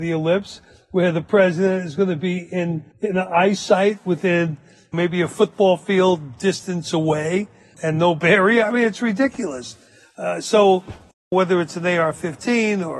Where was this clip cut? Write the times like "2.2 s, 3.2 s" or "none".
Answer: none